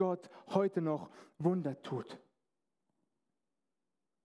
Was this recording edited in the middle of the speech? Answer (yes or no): no